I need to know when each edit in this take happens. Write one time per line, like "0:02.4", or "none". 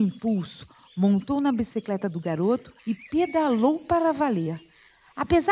0:02.8